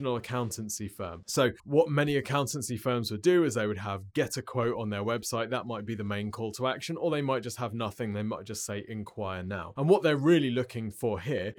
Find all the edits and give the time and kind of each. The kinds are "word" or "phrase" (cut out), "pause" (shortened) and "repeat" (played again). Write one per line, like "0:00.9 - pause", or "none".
0:01.6 - pause